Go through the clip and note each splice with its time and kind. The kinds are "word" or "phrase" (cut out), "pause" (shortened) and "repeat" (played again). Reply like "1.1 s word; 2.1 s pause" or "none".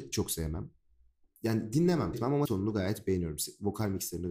2.1 s word; 2.5 s word